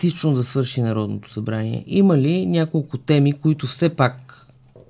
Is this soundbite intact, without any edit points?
yes; 0 cuts

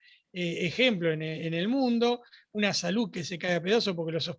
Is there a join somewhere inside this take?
no; 0 cuts

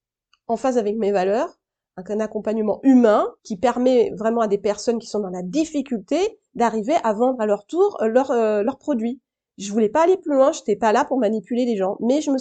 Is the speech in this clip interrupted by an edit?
no; 0 cuts

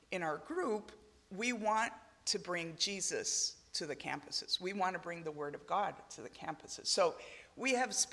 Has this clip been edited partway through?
no; 0 cuts

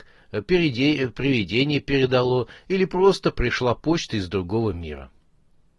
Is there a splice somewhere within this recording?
no; 0 cuts

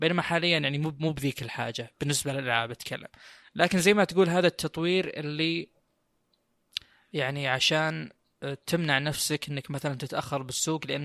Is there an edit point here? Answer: no; 0 cuts

